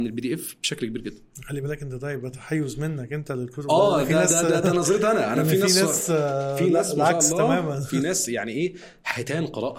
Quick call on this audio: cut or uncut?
uncut